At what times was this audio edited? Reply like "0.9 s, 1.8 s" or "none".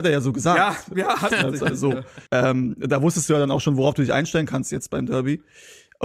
1.3 s, 2.3 s